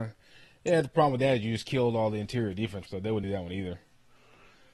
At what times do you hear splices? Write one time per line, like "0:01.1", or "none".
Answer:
0:02.9
0:03.2

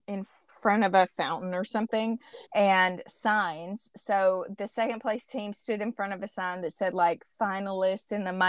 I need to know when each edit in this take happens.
0:02.5

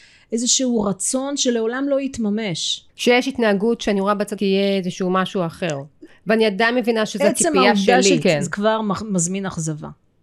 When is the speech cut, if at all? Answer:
0:02.9
0:04.4
0:08.2

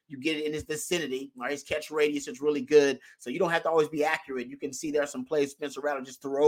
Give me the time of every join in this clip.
none

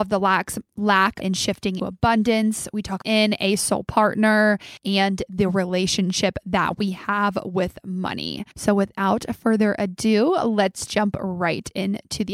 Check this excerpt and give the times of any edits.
0:01.2
0:01.8
0:03.0
0:04.8
0:08.5

